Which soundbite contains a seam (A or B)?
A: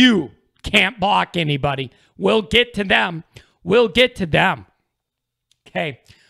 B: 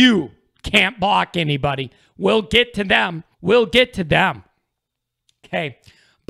B